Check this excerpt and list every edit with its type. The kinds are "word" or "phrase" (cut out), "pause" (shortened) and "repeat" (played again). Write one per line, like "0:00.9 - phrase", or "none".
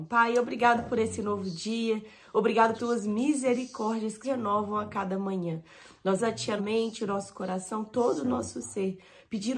0:02.8 - word
0:04.2 - word
0:06.2 - word
0:06.6 - word